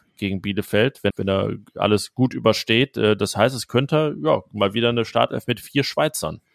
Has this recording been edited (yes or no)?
yes